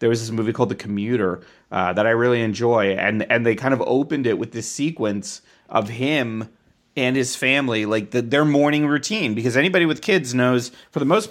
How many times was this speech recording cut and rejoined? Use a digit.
0